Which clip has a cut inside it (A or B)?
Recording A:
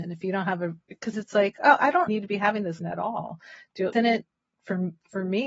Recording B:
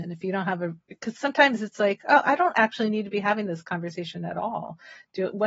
A